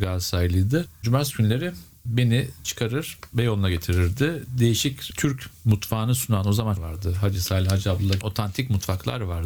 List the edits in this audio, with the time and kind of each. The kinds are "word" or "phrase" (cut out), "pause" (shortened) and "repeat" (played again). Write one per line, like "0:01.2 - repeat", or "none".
0:02.6 - word
0:06.8 - phrase
0:08.2 - word